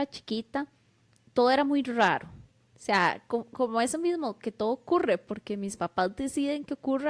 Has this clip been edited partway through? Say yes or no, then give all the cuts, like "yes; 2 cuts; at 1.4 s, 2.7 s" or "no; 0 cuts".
no; 0 cuts